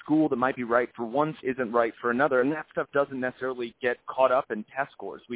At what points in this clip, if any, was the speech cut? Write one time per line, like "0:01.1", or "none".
0:01.4